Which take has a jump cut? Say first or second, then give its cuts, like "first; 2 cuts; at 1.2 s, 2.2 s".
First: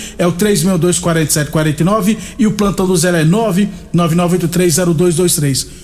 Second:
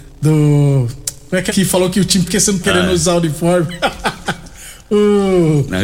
second; 3 cuts; at 1.5 s, 2.2 s, 2.6 s